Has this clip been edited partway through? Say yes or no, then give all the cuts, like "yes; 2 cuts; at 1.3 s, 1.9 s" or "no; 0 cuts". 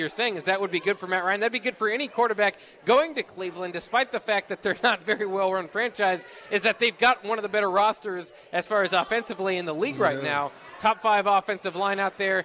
no; 0 cuts